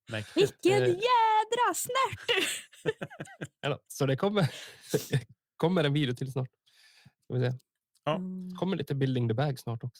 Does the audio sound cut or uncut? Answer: uncut